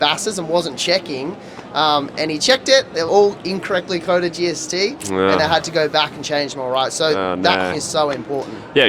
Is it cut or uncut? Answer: cut